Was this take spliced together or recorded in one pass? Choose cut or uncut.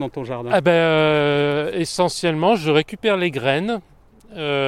uncut